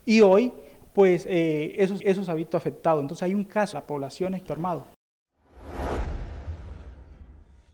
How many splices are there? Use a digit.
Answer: 3